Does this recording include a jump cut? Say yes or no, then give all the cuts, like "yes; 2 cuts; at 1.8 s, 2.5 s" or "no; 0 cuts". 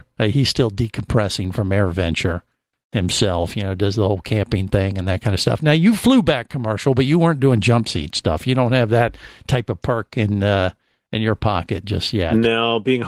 no; 0 cuts